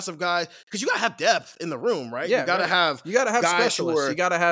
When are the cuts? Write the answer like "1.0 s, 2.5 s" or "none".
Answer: none